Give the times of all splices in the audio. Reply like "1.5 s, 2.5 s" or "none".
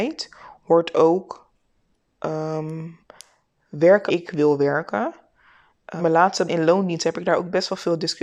4.1 s, 6.0 s, 6.5 s